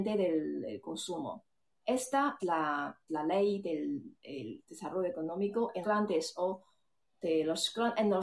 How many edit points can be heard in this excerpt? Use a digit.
3